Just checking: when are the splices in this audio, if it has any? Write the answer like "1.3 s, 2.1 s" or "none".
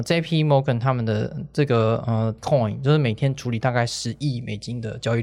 2.4 s